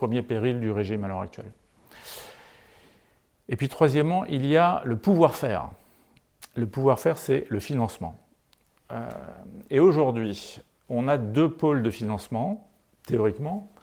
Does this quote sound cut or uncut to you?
uncut